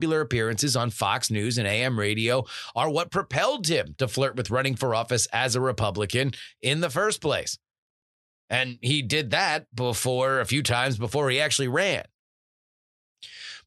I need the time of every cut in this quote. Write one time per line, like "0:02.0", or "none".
none